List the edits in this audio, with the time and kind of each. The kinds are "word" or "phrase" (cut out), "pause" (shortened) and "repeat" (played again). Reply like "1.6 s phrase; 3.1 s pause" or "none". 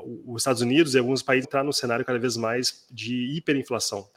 1.4 s word